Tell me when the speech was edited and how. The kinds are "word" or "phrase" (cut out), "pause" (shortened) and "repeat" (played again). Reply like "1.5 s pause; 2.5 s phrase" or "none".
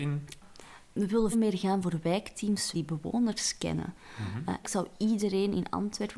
1.3 s word; 2.7 s word; 4.6 s word

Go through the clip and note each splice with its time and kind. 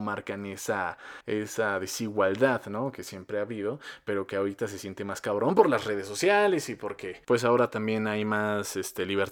1.2 s pause; 7.2 s pause

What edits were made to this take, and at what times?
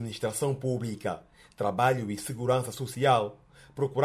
none

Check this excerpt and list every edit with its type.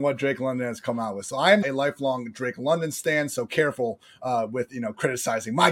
1.6 s word

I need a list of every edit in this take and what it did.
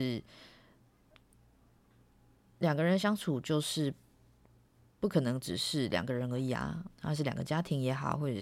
6.9 s pause

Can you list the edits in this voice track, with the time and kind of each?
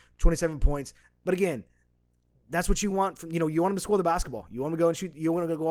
none

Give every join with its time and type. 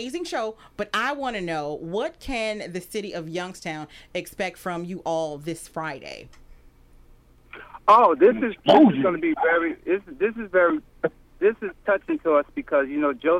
none

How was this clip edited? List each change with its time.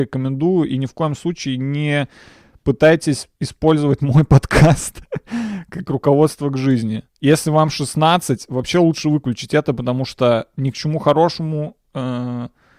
3.3 s pause; 7.1 s pause

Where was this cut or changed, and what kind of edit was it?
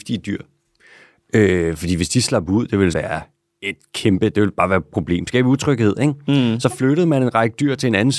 2.9 s word

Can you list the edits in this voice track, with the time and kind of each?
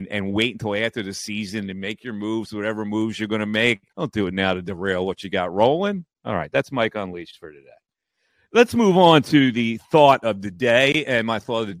3.9 s pause; 7.9 s pause

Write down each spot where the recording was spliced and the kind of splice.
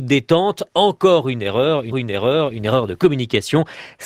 1.9 s repeat

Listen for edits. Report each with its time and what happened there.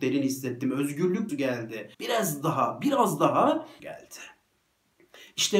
1.3 s word; 1.9 s pause; 3.8 s phrase

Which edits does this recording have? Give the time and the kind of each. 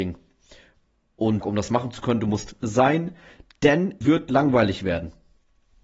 1.4 s phrase; 2.6 s word; 4.0 s word

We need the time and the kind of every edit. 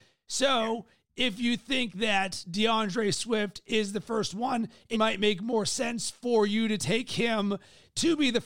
4.9 s word

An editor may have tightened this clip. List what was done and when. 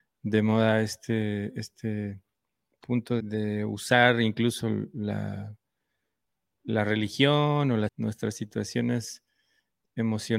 3.2 s word; 7.9 s phrase

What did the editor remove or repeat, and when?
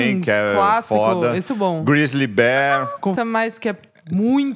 1.5 s word; 3.2 s word

